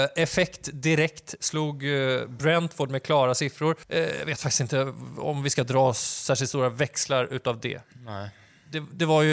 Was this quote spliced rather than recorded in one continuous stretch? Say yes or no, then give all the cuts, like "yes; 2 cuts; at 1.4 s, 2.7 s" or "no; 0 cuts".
no; 0 cuts